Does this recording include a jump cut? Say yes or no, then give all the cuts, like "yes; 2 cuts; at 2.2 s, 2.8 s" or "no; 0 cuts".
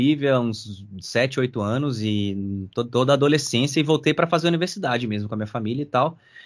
no; 0 cuts